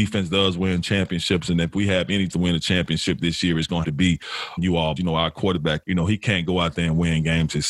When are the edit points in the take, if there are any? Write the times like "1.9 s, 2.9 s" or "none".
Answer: 2.3 s, 3.8 s, 4.6 s, 5.0 s, 5.8 s